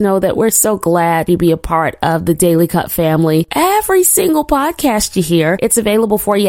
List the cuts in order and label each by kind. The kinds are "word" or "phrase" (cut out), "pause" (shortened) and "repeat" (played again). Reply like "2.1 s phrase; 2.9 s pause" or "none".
1.3 s phrase